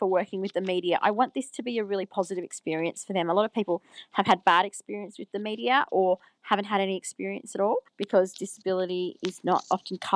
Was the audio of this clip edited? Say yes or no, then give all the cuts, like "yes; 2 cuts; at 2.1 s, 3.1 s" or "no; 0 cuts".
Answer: yes; 1 cut; at 7.9 s